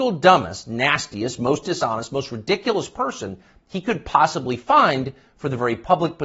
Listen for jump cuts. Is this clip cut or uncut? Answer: uncut